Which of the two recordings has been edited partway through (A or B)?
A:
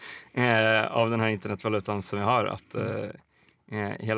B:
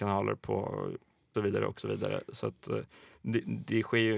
B